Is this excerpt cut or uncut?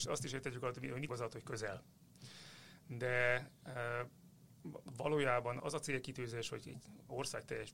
cut